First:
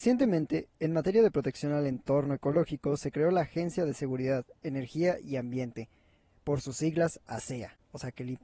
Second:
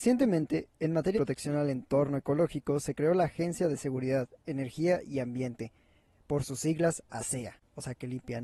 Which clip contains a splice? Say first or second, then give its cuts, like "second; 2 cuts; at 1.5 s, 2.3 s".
second; 1 cut; at 1.1 s